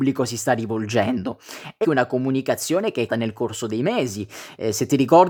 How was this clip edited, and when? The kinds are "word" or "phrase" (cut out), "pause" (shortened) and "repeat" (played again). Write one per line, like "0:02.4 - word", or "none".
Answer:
0:01.8 - word
0:03.1 - word